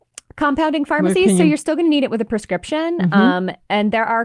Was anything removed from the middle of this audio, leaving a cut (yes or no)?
no